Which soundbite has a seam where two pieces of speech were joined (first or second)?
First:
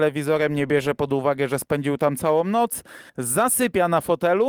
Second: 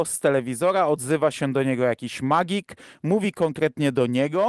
first